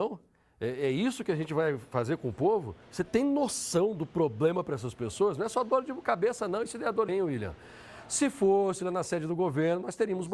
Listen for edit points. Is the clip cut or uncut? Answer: cut